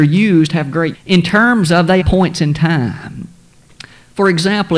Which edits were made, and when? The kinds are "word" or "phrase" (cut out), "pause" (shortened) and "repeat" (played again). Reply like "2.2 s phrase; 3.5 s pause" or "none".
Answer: 0.9 s word; 2.0 s word

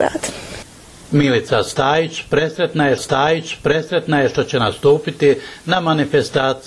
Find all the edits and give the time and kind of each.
3.0 s repeat

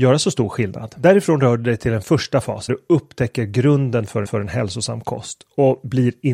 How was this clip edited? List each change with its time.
2.7 s word; 4.2 s repeat

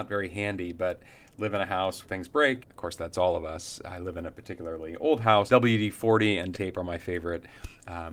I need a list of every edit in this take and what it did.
2.0 s word; 2.6 s word; 5.5 s word; 6.5 s word

